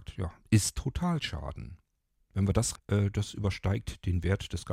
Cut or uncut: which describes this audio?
cut